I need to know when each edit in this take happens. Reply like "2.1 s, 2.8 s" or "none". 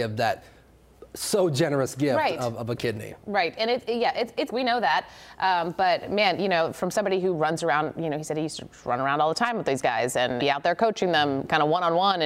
4.5 s, 10.4 s